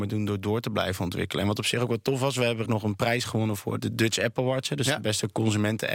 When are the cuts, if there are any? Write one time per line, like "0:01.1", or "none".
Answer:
0:02.6
0:03.8